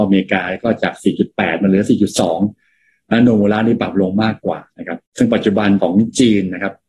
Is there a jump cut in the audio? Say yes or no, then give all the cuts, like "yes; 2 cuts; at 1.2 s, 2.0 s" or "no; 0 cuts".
yes; 2 cuts; at 5.1 s, 5.8 s